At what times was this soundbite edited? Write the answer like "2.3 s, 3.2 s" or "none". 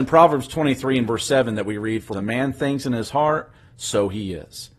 2.1 s